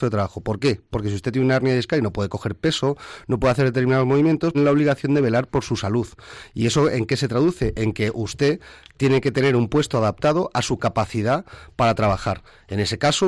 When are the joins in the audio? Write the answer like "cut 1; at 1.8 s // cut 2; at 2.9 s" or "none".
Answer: cut 1; at 4.5 s